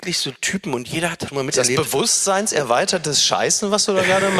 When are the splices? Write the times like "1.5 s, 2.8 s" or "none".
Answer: 1.3 s

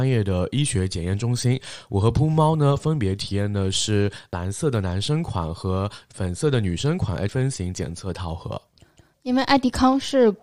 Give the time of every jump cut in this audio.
7.3 s

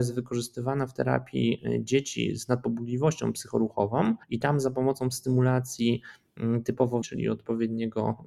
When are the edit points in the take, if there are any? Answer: 4.2 s, 7.0 s

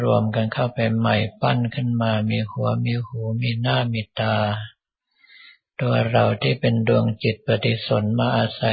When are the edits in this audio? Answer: none

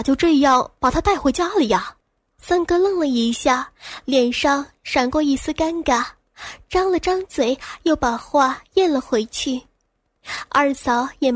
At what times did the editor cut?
2.0 s

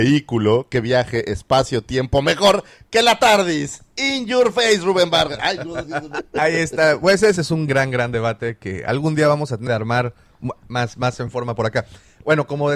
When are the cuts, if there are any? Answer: 5.8 s, 7.4 s, 7.7 s, 9.7 s

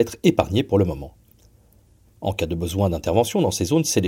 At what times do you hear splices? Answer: none

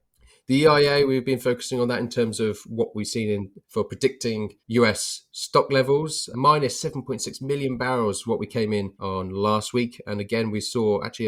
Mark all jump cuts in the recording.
3.6 s, 4.6 s, 6.3 s, 8.9 s

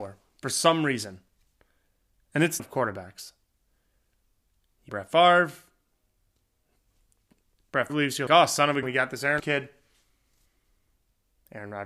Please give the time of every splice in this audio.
2.6 s, 4.9 s, 7.9 s, 8.3 s, 8.8 s, 9.4 s

